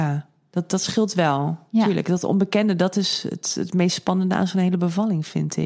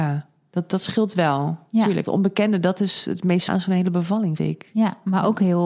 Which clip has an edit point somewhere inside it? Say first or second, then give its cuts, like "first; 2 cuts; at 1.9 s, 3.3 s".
second; 4 cuts; at 2.0 s, 3.1 s, 3.5 s, 4.4 s